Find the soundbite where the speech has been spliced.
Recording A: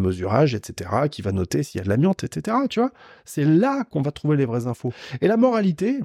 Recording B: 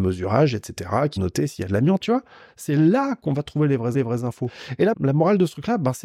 B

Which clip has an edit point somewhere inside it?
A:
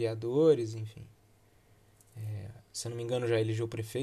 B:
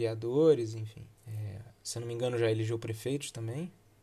B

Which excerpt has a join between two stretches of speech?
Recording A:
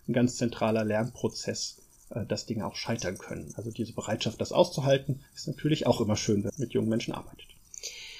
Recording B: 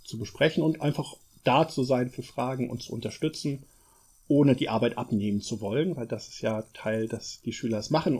A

